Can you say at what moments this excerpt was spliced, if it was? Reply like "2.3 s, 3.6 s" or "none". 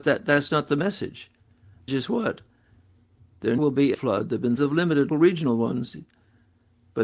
1.9 s, 3.6 s, 3.9 s, 4.6 s, 5.1 s